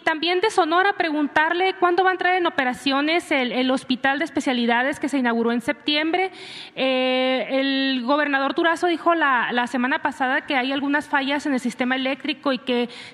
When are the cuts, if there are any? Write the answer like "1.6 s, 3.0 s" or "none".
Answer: none